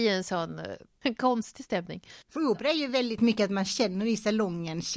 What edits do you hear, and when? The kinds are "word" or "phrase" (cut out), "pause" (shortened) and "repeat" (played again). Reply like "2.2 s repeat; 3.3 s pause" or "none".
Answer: 2.2 s pause